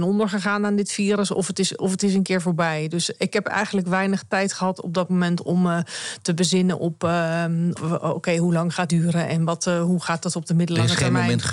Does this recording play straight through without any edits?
no; 2 cuts; at 7.7 s, 8.9 s

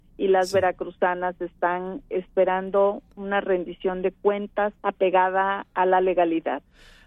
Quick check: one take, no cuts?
no; 1 cut; at 4.8 s

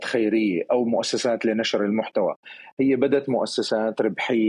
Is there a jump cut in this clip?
no; 0 cuts

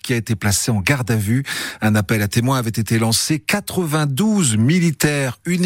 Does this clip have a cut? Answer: no; 0 cuts

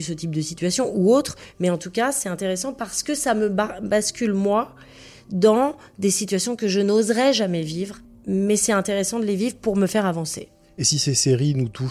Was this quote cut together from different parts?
yes; 1 cut; at 8.0 s

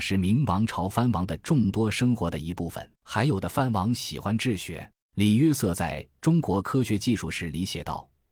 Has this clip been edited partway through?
yes; 2 cuts; at 3.0 s, 5.0 s

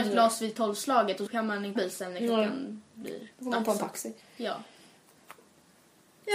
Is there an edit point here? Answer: yes; 4 cuts; at 1.3 s, 1.8 s, 3.3 s, 4.2 s

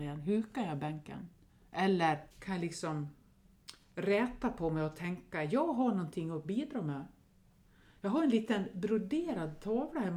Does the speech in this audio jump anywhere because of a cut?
yes; 1 cut; at 2.3 s

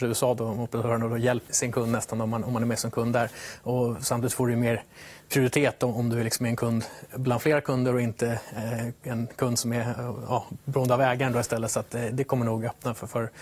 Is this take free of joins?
no; 1 cut; at 1.5 s

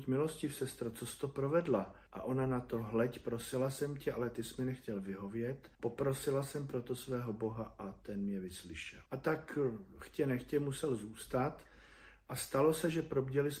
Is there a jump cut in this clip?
yes; 3 cuts; at 2.1 s, 5.7 s, 9.1 s

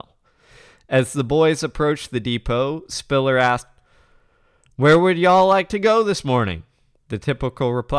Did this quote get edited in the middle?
no; 0 cuts

